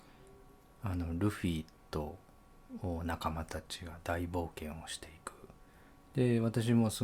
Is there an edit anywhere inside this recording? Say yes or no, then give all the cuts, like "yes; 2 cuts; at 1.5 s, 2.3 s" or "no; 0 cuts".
no; 0 cuts